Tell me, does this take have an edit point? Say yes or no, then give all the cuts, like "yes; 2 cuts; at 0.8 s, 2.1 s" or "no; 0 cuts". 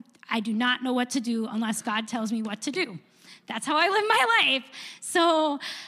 no; 0 cuts